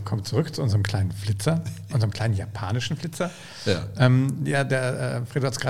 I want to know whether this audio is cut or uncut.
uncut